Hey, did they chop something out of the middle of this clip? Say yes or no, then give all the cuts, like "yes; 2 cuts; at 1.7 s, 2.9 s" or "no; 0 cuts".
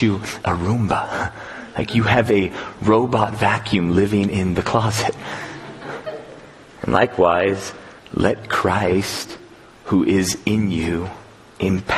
no; 0 cuts